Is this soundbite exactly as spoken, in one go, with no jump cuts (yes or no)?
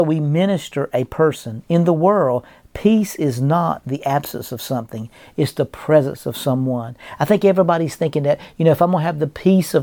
yes